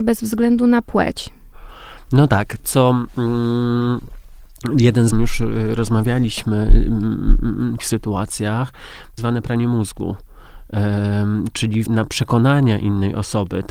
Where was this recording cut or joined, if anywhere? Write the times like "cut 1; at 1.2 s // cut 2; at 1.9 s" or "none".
cut 1; at 2.6 s // cut 2; at 5.1 s // cut 3; at 7.8 s // cut 4; at 9.2 s // cut 5; at 11.9 s